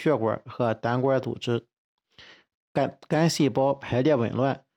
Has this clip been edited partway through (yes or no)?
no